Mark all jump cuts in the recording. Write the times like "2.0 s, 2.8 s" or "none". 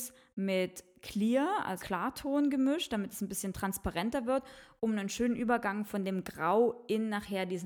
1.8 s